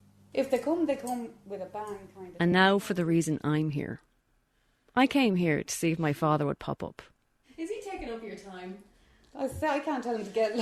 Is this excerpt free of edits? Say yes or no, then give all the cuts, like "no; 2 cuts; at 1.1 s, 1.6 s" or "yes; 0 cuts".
yes; 0 cuts